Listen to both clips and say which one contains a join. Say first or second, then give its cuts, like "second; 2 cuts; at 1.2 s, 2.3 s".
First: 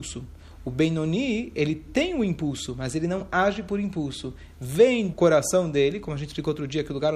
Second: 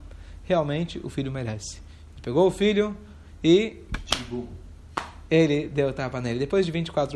first; 1 cut; at 5.1 s